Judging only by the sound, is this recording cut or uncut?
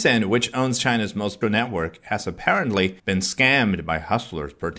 cut